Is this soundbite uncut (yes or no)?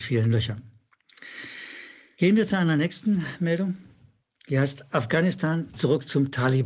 yes